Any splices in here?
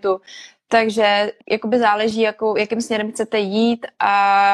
yes; 1 cut; at 1.4 s

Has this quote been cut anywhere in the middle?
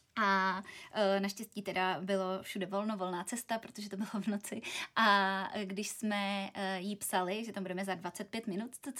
no; 0 cuts

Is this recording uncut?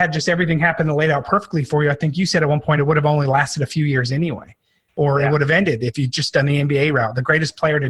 yes; 0 cuts

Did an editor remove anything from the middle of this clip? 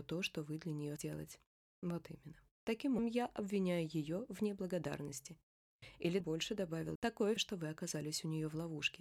yes; 5 cuts; at 1.0 s, 3.0 s, 6.2 s, 7.0 s, 7.4 s

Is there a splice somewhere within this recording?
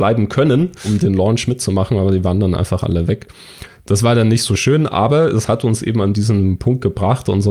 no; 0 cuts

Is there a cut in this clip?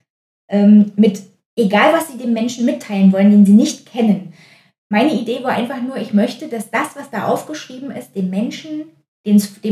no; 0 cuts

